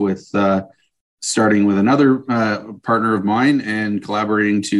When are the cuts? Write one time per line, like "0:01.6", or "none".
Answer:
none